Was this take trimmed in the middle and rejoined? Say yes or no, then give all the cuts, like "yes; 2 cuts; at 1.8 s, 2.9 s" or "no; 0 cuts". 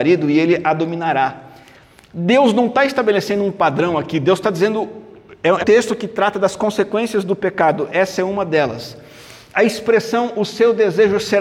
yes; 1 cut; at 5.6 s